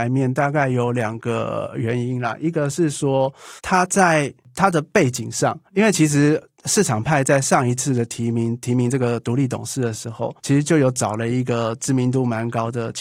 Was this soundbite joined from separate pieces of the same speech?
yes; 3 cuts; at 3.6 s, 5.7 s, 10.4 s

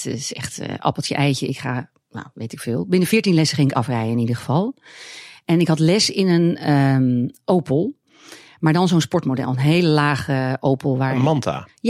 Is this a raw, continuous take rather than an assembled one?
yes; 0 cuts

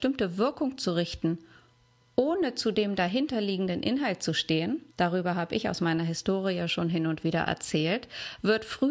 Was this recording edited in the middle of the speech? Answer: yes; 1 cut; at 4.9 s

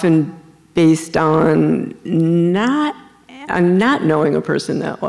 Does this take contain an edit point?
yes; 1 cut; at 3.5 s

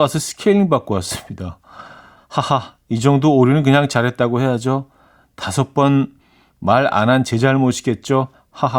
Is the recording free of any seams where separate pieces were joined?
yes; 0 cuts

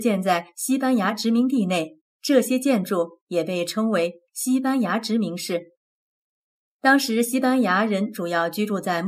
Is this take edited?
yes; 1 cut; at 2.1 s

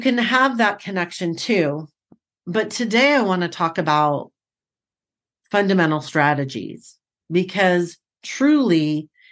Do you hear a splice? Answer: no; 0 cuts

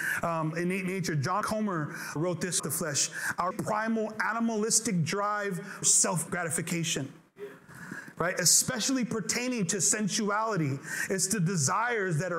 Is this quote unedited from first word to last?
no; 6 cuts; at 1.4 s, 2.2 s, 2.6 s, 3.5 s, 5.8 s, 6.3 s

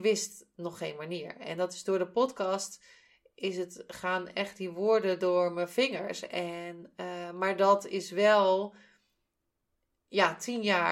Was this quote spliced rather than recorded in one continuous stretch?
no; 0 cuts

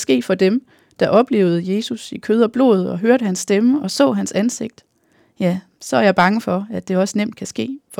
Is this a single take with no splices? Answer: yes; 0 cuts

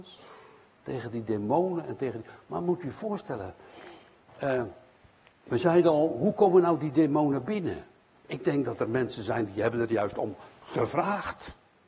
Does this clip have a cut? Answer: no; 0 cuts

